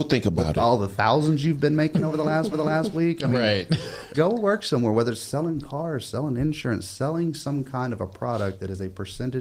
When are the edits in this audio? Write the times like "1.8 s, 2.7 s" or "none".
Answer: 2.5 s, 4.1 s